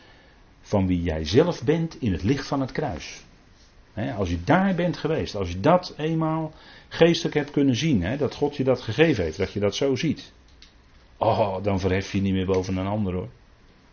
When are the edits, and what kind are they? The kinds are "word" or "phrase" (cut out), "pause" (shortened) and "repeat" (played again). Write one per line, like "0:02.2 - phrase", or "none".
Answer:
none